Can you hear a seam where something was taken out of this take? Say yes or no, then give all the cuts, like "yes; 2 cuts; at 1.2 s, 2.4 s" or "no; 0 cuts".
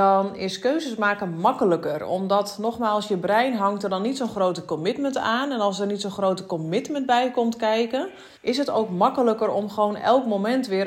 yes; 1 cut; at 8.4 s